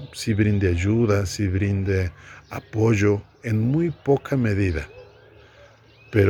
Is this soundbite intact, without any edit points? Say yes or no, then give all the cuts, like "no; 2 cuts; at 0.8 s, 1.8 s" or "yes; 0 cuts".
yes; 0 cuts